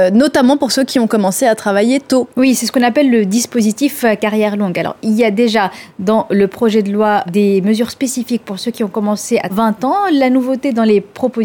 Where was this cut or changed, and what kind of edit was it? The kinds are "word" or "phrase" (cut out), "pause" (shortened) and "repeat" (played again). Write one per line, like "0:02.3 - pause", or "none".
0:02.3 - pause
0:07.3 - word
0:09.5 - phrase